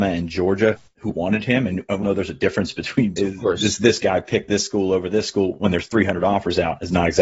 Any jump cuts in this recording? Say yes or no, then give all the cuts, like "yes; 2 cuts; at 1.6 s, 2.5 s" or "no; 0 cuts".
yes; 3 cuts; at 1.1 s, 2.0 s, 3.2 s